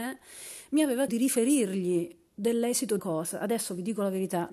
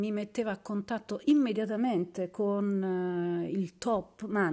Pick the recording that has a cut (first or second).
first